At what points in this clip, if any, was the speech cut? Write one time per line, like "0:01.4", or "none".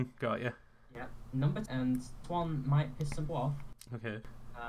0:01.7
0:02.2
0:03.3